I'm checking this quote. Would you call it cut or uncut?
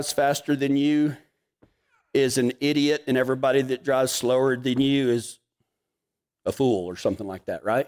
uncut